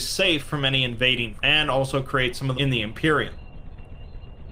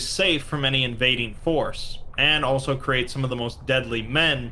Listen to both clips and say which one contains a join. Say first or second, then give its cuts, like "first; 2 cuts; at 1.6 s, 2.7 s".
first; 2 cuts; at 1.4 s, 2.5 s